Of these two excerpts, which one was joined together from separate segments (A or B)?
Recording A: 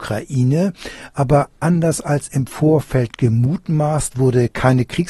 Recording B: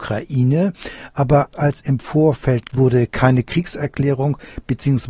B